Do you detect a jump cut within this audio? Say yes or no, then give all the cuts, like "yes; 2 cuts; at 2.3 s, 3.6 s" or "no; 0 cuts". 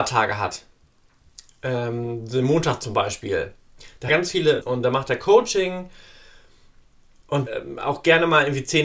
yes; 3 cuts; at 4.1 s, 4.6 s, 7.5 s